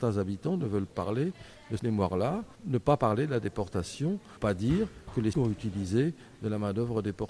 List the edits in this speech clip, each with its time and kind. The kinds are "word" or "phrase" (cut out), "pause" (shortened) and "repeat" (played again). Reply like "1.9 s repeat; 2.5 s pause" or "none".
0.9 s word; 1.8 s word; 2.6 s pause; 4.4 s word; 5.3 s word